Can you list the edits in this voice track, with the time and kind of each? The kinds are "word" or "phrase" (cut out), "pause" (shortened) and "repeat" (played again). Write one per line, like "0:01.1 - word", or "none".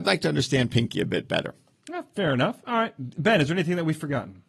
none